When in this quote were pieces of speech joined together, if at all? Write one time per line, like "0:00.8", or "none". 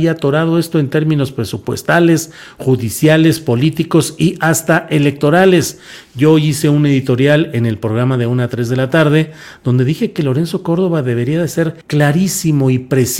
0:11.8